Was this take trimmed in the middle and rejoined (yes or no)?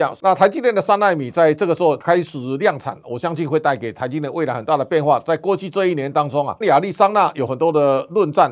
yes